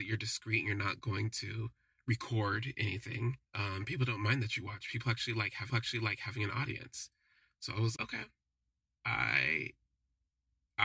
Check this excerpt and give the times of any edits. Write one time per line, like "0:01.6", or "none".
0:03.4
0:05.7
0:08.0